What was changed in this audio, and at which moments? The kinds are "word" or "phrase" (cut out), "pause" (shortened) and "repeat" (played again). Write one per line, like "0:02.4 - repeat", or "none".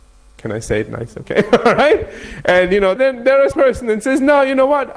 0:03.0 - word
0:03.5 - word